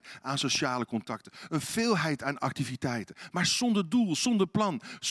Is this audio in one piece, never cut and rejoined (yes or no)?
yes